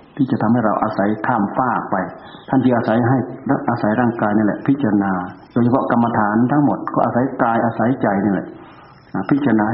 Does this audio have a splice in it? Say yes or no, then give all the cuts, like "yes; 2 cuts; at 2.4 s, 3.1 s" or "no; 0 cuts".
yes; 2 cuts; at 2.4 s, 5.4 s